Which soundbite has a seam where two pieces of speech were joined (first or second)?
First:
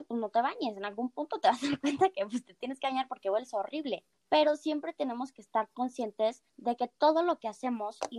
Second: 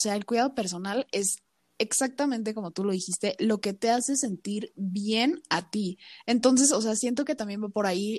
first